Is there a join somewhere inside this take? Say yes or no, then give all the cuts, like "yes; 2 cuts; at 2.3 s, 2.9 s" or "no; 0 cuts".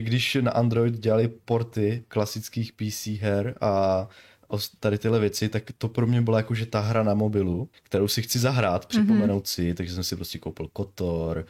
yes; 1 cut; at 7.7 s